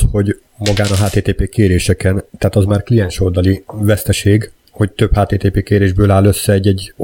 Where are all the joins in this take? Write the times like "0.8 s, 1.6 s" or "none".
none